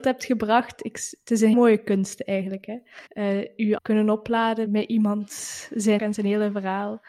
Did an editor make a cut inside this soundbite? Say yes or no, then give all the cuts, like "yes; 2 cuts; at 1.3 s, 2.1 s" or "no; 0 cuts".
yes; 5 cuts; at 1.5 s, 3.1 s, 3.8 s, 4.7 s, 6.0 s